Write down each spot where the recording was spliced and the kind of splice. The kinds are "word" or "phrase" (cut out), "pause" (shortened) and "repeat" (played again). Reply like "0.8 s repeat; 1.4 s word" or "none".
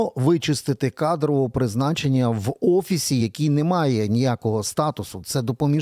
none